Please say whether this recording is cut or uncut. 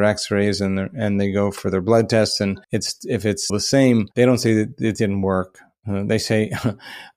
cut